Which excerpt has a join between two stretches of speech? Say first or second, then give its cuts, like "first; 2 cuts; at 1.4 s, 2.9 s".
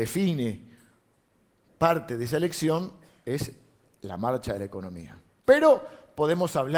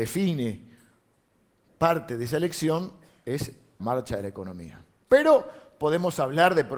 second; 1 cut; at 3.8 s